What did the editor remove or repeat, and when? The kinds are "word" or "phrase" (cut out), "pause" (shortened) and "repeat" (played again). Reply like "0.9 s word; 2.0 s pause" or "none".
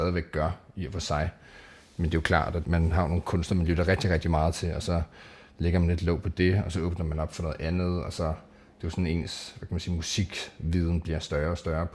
2.6 s word